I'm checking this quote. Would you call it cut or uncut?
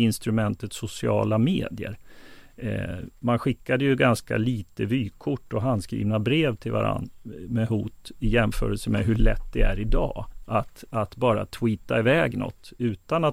uncut